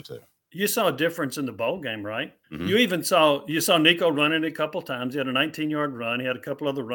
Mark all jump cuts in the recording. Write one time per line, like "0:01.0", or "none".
0:02.4